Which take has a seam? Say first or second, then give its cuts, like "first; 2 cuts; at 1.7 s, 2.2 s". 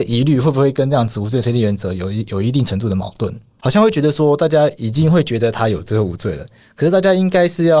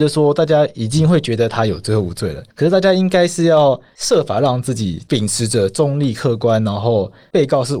second; 1 cut; at 2.5 s